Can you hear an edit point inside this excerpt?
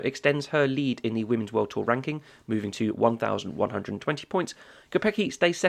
no; 0 cuts

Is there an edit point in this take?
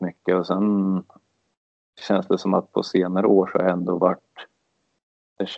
no; 0 cuts

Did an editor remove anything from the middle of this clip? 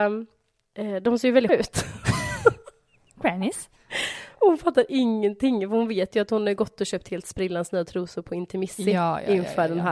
yes; 1 cut; at 1.5 s

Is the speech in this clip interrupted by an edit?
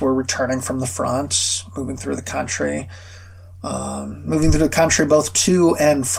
no; 0 cuts

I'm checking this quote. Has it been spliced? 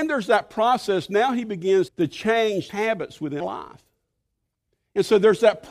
yes; 3 cuts; at 1.9 s, 2.7 s, 3.4 s

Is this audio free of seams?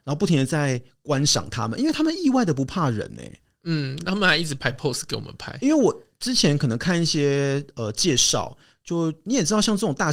yes; 0 cuts

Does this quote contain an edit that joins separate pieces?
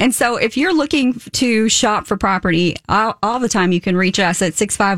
no; 0 cuts

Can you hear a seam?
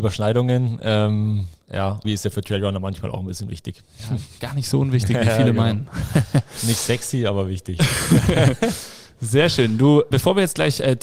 yes; 2 cuts; at 2.0 s, 10.1 s

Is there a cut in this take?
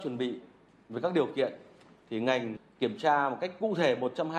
no; 0 cuts

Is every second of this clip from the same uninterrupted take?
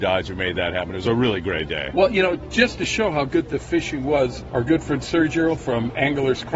yes; 0 cuts

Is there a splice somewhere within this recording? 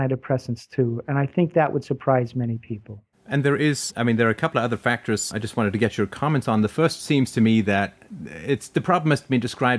yes; 3 cuts; at 3.1 s, 3.9 s, 5.3 s

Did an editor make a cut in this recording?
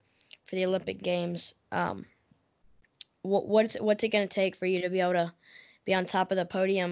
no; 0 cuts

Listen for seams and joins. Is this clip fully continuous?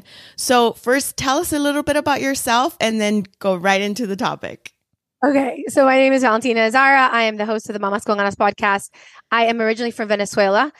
yes; 0 cuts

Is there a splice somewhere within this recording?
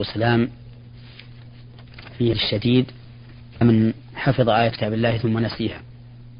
yes; 3 cuts; at 2.3 s, 3.6 s, 4.7 s

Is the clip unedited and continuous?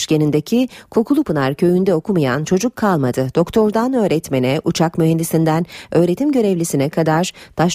yes; 0 cuts

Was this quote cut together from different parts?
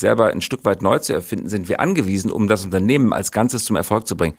no; 0 cuts

